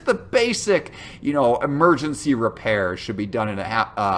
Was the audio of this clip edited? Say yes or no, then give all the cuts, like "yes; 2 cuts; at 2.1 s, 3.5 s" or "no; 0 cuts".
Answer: no; 0 cuts